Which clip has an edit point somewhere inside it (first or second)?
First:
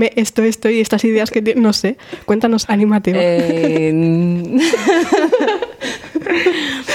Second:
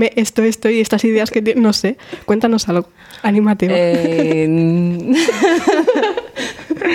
first